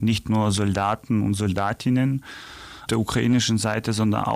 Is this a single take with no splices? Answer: no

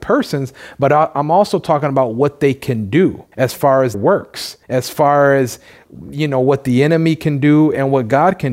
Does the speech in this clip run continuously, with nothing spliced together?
no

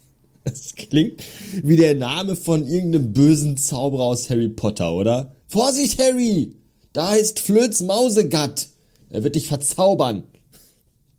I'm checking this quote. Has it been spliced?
yes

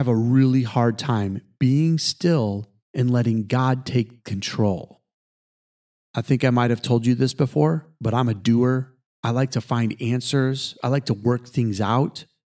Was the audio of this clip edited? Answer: no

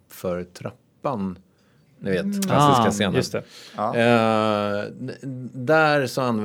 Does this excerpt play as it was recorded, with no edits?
yes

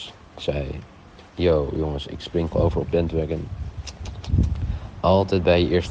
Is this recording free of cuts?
no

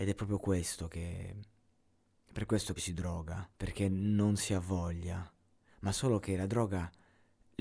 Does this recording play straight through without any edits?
no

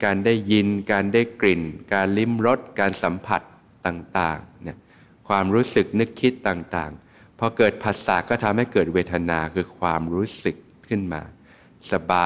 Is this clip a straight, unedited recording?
yes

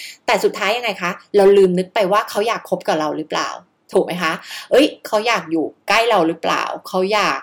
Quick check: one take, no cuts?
yes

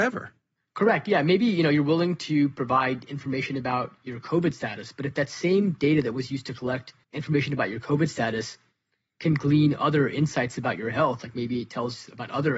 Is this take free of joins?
no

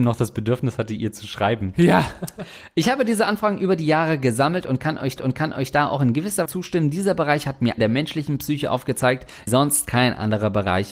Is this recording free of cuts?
no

